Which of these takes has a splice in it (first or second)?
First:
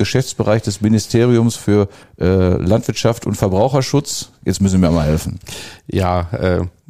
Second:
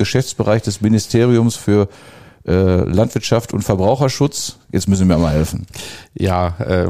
first